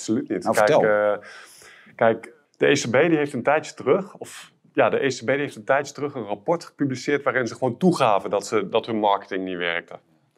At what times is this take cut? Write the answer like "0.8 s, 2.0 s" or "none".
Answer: none